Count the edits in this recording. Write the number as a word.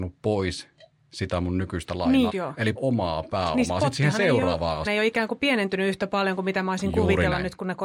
three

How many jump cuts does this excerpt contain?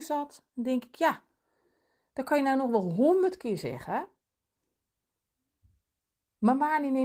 zero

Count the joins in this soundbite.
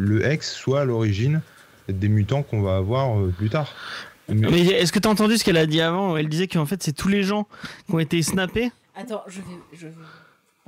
zero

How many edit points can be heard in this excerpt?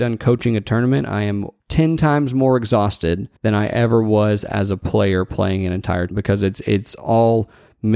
three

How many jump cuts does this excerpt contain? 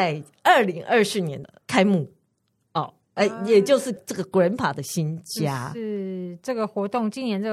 one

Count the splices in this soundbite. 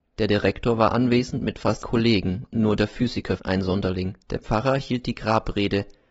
three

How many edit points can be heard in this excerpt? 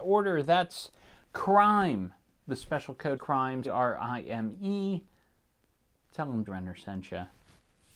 three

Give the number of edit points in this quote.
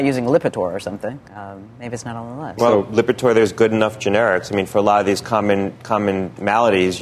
one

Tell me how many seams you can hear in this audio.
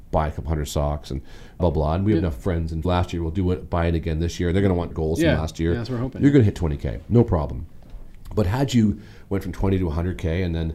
three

